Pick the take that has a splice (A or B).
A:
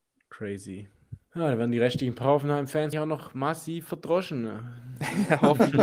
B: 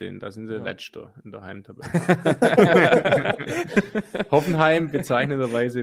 A